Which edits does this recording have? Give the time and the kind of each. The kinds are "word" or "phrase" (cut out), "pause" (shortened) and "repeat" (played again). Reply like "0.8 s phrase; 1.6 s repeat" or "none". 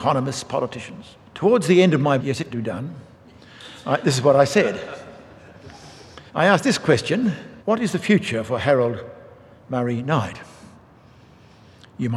1.3 s pause; 2.2 s phrase; 2.5 s word; 6.3 s pause; 7.6 s pause

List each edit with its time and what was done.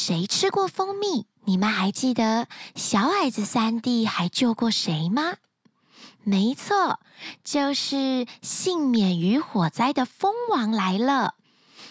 1.3 s pause

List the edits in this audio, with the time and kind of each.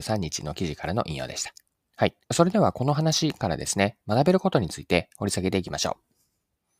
1.8 s pause; 2.2 s pause

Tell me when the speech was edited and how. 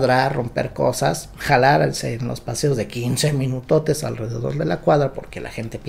none

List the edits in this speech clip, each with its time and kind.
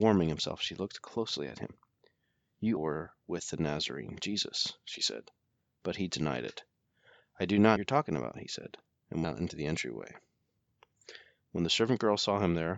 2.8 s word; 7.8 s phrase; 9.2 s word

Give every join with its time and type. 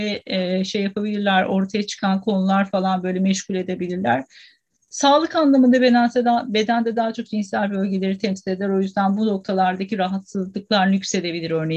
none

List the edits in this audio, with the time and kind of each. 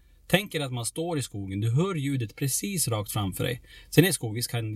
none

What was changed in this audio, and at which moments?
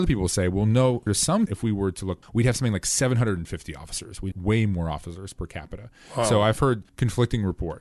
1.1 s word; 1.5 s word; 2.2 s word; 4.3 s word; 6.9 s pause

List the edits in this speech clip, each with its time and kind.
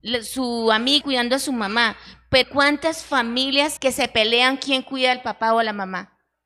1.0 s word; 2.4 s word; 3.8 s word

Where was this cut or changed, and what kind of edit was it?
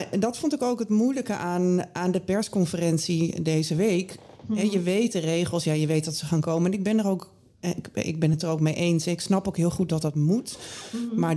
none

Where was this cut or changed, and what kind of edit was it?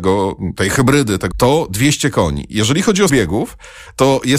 1.3 s phrase; 3.1 s word

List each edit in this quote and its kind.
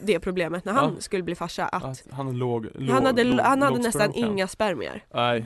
none

